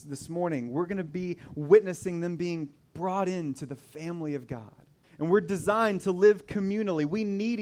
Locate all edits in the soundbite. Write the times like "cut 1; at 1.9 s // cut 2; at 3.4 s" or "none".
cut 1; at 2.8 s // cut 2; at 5.0 s